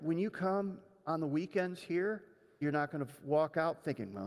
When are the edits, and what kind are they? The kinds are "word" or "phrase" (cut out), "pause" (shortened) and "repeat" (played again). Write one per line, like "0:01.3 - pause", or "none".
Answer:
0:02.6 - word